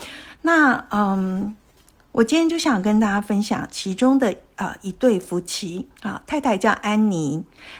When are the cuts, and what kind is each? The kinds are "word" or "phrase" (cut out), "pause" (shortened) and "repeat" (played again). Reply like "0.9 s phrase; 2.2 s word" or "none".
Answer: 6.0 s pause